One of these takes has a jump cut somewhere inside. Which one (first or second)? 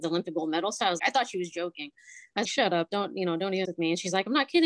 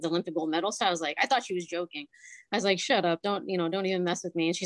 first